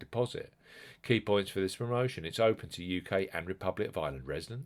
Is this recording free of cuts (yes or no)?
yes